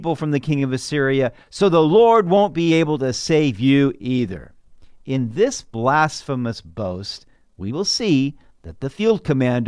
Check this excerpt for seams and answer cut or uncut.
uncut